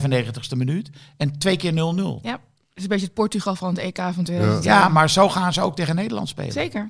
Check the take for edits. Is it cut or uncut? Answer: uncut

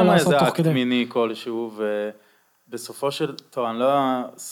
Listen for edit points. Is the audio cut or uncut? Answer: uncut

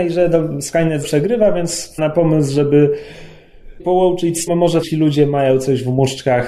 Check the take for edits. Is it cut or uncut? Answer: cut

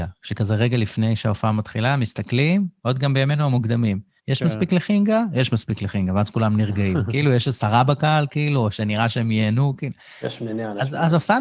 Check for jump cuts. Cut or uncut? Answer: cut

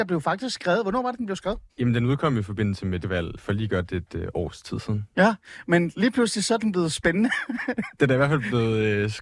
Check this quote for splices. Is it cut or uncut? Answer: cut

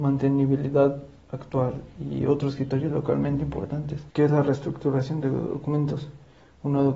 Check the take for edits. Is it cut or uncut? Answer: cut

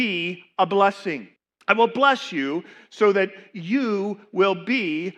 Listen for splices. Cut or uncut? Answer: cut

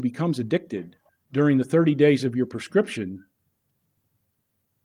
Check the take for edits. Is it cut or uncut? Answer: cut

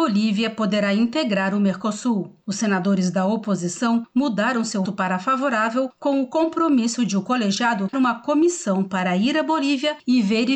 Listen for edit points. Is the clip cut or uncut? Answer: cut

